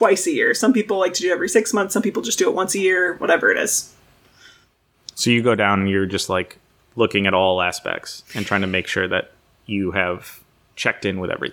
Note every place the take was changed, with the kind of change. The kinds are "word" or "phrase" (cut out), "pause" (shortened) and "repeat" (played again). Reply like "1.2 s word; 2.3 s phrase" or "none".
none